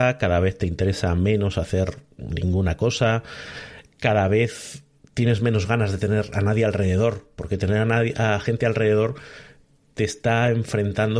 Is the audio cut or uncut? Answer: uncut